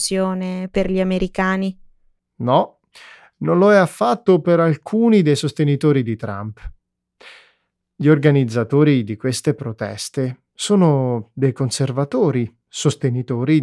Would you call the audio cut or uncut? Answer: uncut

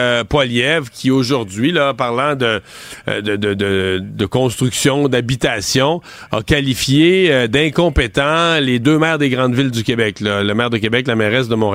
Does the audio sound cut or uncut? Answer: uncut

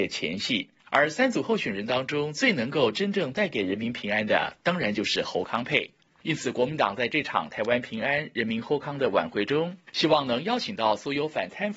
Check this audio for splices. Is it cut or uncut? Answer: uncut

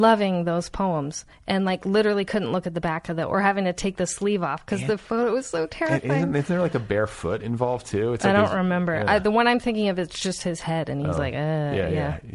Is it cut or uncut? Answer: uncut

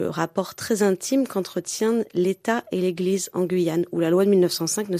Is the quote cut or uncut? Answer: uncut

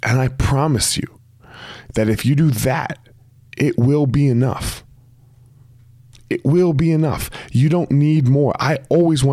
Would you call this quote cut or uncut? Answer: uncut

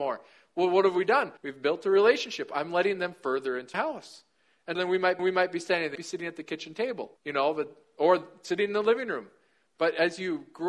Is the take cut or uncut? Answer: cut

